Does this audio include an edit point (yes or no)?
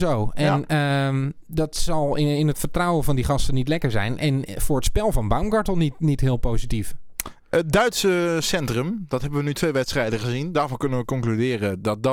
no